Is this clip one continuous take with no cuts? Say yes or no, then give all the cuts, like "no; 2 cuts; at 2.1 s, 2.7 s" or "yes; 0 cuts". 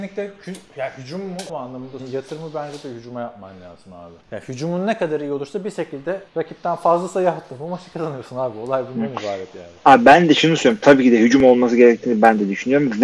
no; 4 cuts; at 1.5 s, 2.0 s, 4.2 s, 6.3 s